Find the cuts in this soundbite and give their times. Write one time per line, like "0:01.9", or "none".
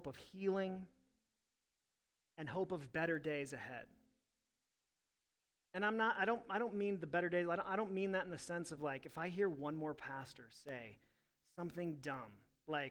none